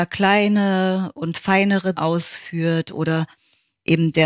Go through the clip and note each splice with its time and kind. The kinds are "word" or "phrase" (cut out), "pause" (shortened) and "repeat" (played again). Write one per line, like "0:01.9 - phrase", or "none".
0:02.0 - word